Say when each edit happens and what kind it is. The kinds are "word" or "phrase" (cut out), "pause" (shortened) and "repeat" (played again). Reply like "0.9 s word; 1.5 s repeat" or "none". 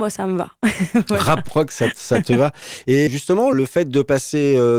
1.4 s word; 3.1 s word; 3.5 s word